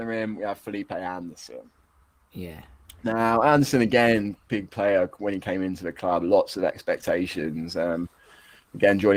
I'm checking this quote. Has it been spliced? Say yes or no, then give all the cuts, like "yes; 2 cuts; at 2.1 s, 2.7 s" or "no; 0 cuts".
yes; 1 cut; at 4.5 s